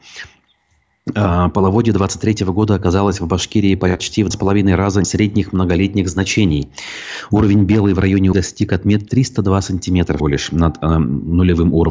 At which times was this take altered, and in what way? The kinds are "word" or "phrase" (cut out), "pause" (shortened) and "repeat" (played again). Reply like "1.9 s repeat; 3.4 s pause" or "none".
4.3 s word; 5.0 s word; 8.3 s word; 9.1 s word; 10.2 s word